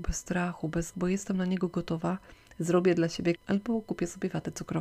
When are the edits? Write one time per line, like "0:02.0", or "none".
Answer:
0:00.9
0:03.4